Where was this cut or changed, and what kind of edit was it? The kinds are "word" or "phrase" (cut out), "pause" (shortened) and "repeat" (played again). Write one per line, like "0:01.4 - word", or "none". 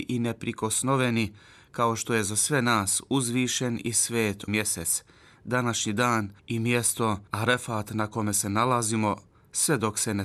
0:04.5 - word
0:06.4 - pause
0:07.3 - pause